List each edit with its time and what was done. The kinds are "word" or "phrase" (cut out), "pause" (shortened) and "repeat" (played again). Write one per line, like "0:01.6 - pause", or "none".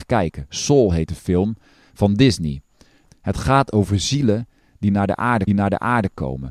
0:05.5 - repeat